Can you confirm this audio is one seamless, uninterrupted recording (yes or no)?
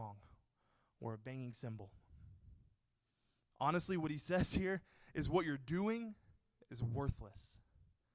yes